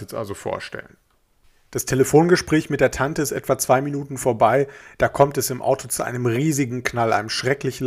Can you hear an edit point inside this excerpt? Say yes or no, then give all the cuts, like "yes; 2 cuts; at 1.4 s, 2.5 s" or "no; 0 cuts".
no; 0 cuts